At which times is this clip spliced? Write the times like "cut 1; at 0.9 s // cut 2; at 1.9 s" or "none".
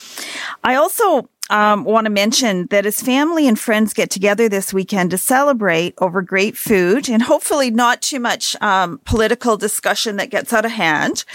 none